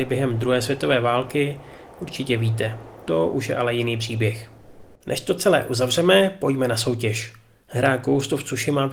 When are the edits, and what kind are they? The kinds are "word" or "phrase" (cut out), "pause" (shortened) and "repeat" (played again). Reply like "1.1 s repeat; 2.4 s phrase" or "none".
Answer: 5.0 s pause